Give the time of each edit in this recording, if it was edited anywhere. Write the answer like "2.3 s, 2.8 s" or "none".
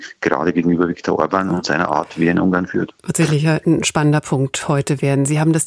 none